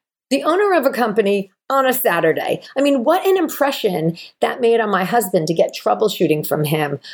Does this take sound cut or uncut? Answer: uncut